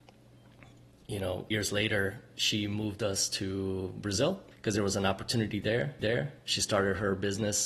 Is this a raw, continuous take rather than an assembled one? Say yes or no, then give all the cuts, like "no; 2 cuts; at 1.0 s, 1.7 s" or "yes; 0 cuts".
no; 3 cuts; at 1.5 s, 4.5 s, 6.0 s